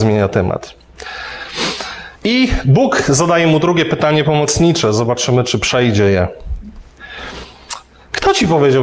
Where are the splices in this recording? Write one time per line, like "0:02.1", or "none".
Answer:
0:02.2